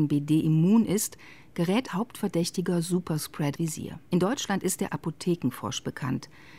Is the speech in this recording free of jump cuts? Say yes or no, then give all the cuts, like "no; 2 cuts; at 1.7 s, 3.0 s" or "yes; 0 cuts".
no; 4 cuts; at 1.9 s, 3.6 s, 4.1 s, 4.9 s